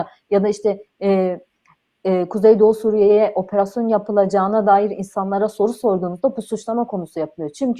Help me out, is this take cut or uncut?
uncut